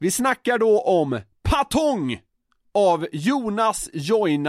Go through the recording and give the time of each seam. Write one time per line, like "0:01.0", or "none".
none

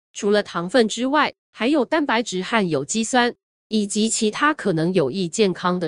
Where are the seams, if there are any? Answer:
0:01.4

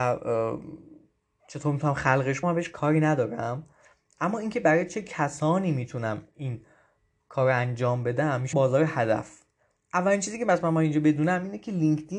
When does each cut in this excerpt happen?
0:02.4
0:08.5

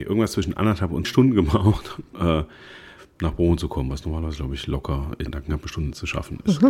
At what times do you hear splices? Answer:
0:01.0
0:02.1
0:05.3

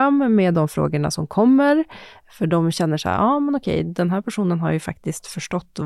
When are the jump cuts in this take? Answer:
none

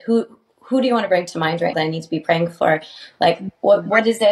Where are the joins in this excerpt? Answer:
0:01.7

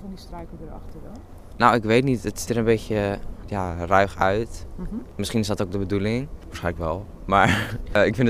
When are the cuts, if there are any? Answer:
0:02.5

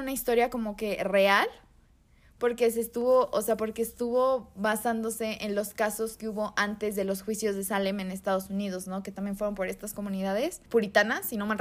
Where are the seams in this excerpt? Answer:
none

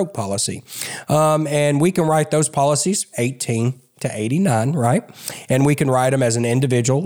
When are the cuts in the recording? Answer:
none

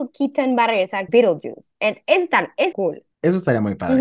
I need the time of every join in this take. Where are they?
0:01.1
0:02.7

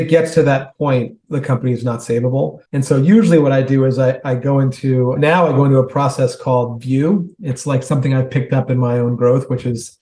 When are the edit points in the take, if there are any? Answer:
0:02.6

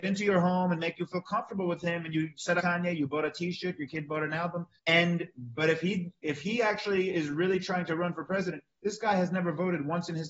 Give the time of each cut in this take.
0:02.6
0:04.8

